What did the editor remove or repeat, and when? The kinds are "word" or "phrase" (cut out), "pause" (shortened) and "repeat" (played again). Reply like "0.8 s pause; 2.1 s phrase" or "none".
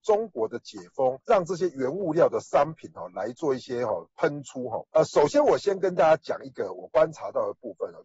1.2 s pause; 4.9 s pause